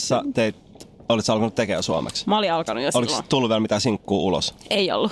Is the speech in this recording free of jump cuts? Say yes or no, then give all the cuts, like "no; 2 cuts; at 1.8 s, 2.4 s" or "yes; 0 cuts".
yes; 0 cuts